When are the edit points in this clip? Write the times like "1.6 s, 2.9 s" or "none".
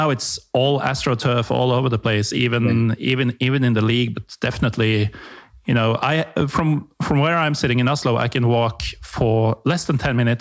none